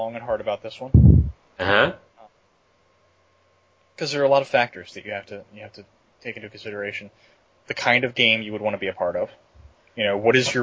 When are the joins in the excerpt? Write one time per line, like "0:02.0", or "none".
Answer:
none